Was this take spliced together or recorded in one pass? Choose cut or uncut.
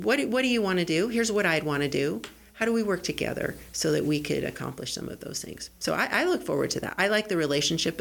uncut